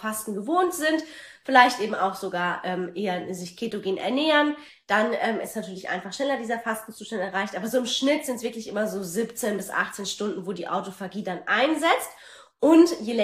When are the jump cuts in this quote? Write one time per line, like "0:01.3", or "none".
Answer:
none

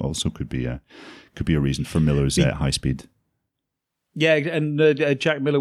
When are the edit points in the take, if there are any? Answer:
none

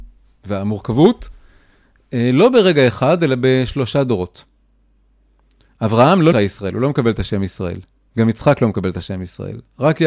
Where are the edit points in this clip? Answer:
0:06.3

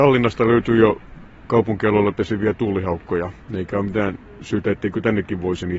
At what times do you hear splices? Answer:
none

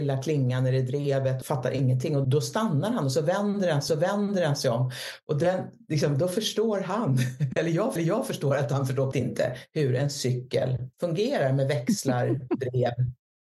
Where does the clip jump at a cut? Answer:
0:01.4
0:02.2
0:03.9
0:08.0
0:09.1
0:10.9

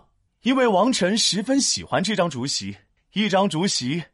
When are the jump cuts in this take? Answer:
none

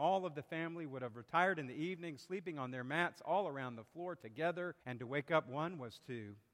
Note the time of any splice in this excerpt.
0:04.8

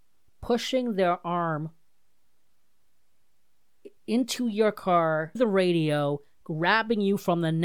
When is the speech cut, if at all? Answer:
0:04.0
0:05.4

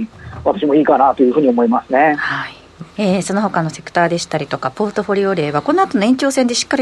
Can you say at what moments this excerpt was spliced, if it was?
0:02.9

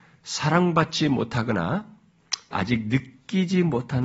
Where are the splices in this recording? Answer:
0:02.5

